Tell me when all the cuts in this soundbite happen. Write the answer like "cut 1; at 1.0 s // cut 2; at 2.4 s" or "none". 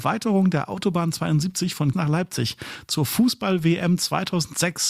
cut 1; at 1.9 s